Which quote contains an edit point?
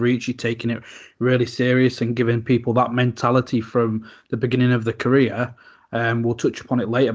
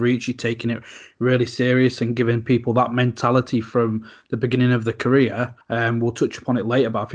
second; 1 cut; at 5.6 s

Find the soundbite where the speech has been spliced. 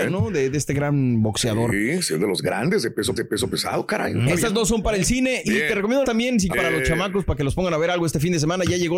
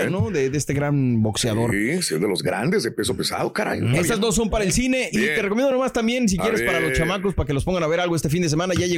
first; 3 cuts; at 3.2 s, 6.0 s, 6.5 s

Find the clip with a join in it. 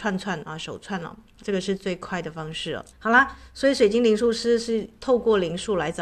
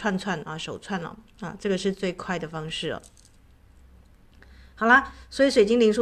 first; 2 cuts; at 1.4 s, 2.9 s

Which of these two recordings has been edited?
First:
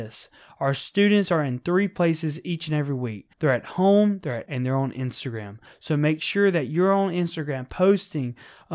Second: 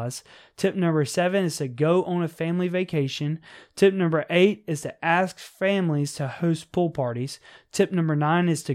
first; 2 cuts; at 3.3 s, 4.5 s

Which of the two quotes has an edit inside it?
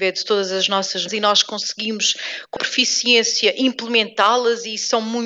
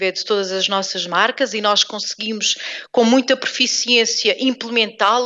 first; 2 cuts; at 1.1 s, 2.6 s

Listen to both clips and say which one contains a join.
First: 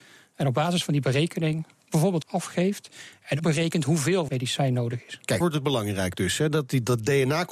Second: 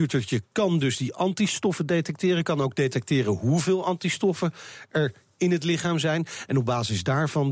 first; 4 cuts; at 2.2 s, 3.4 s, 4.3 s, 5.4 s

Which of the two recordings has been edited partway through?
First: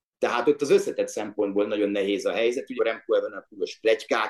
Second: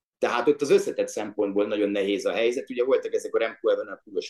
first; 1 cut; at 2.8 s

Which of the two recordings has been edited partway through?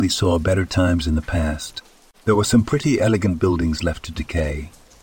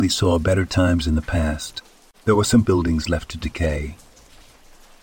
second; 1 cut; at 2.6 s

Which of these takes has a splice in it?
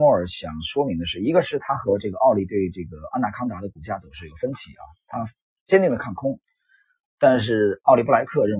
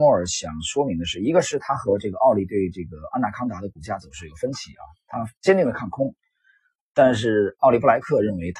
second; 1 cut; at 5.4 s

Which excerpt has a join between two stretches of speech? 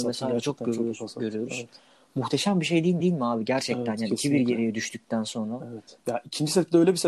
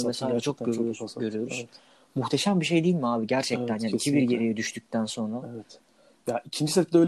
first; 2 cuts; at 3.0 s, 6.0 s

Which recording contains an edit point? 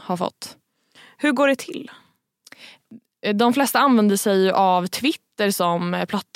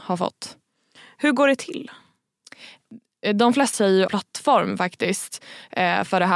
second; 2 cuts; at 3.7 s, 4.1 s

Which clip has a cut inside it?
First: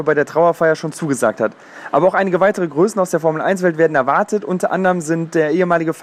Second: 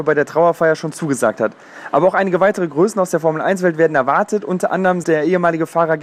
second; 1 cut; at 5.0 s

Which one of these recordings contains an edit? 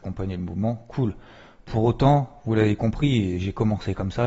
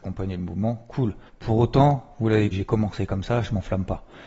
second; 2 cuts; at 1.3 s, 2.5 s

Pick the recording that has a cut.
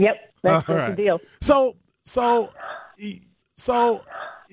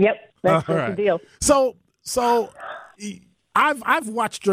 first; 1 cut; at 3.4 s

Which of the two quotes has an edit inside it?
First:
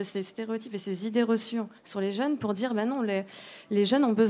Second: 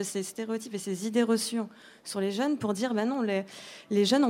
first; 1 cut; at 1.8 s

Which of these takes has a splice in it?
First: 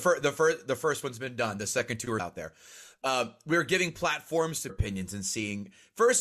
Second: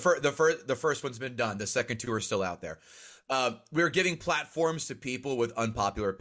first; 2 cuts; at 2.2 s, 4.7 s

